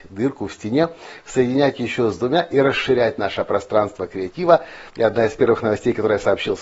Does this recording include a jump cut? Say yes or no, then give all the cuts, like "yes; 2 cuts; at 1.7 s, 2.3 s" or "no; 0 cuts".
yes; 1 cut; at 4.9 s